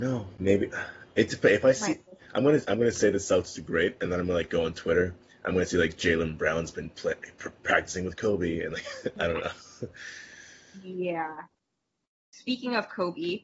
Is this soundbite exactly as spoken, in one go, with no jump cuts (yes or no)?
yes